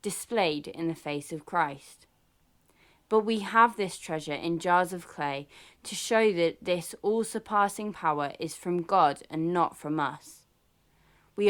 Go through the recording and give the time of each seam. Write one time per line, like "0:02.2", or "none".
none